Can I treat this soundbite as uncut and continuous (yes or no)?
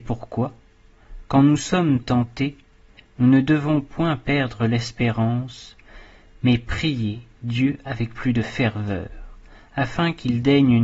yes